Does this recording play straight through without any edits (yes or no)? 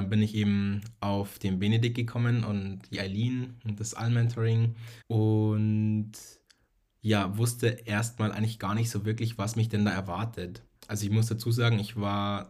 no